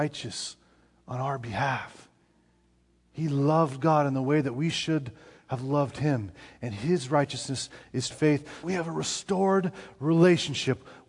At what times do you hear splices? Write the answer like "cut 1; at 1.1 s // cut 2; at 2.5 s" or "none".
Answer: cut 1; at 8.1 s // cut 2; at 8.6 s